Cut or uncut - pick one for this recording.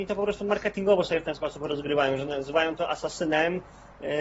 uncut